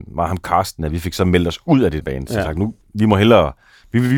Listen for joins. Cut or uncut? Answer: cut